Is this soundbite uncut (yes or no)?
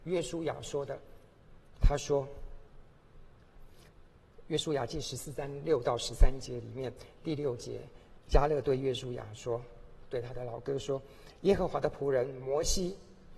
no